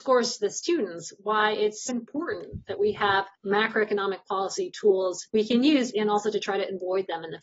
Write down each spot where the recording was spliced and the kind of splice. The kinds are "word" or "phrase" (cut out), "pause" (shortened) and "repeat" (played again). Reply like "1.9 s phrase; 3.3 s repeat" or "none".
1.9 s word; 3.4 s pause; 5.3 s pause; 5.9 s phrase